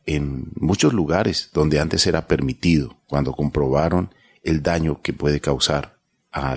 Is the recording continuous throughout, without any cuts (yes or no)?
yes